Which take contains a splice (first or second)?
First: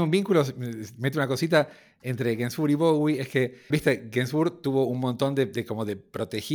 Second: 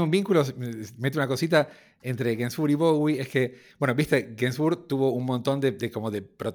first